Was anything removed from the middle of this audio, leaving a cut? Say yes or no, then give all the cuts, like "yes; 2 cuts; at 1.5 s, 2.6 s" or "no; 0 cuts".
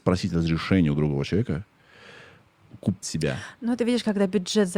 yes; 1 cut; at 3.0 s